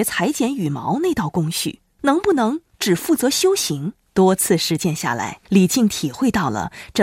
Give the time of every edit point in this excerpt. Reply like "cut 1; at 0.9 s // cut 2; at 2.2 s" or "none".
cut 1; at 4.0 s